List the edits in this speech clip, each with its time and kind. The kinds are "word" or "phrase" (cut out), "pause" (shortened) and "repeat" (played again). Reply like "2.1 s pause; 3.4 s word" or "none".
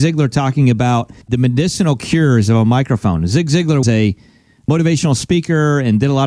1.2 s pause; 3.8 s word